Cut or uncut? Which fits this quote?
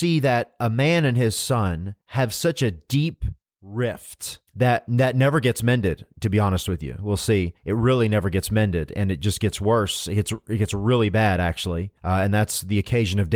cut